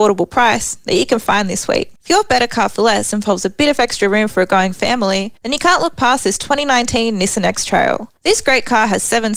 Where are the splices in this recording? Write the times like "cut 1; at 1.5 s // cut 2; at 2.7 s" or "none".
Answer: cut 1; at 2.0 s // cut 2; at 5.4 s // cut 3; at 8.2 s